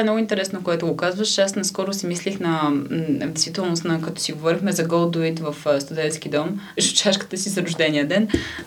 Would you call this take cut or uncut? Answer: cut